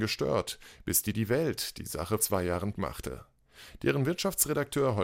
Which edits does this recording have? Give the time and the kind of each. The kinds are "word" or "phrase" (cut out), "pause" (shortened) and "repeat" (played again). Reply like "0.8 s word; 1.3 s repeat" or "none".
1.1 s word; 2.2 s word; 2.7 s word